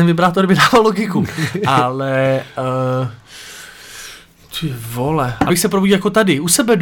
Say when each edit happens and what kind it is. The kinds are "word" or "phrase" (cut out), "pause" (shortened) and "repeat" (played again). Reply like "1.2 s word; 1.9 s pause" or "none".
5.5 s word

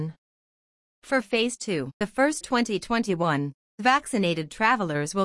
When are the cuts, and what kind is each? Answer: 2.0 s word; 2.4 s word

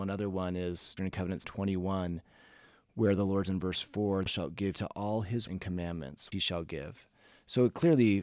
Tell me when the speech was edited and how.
1.0 s word; 1.4 s word; 3.5 s word; 4.3 s word; 4.7 s word; 5.5 s word; 6.3 s word

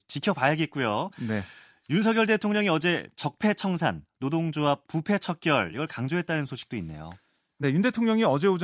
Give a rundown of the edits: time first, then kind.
none

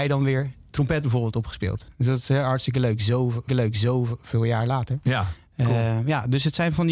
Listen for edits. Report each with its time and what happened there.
1.9 s pause; 3.5 s repeat

